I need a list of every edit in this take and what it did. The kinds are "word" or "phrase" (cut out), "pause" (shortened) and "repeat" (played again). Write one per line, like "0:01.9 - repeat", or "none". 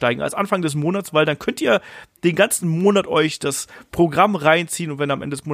none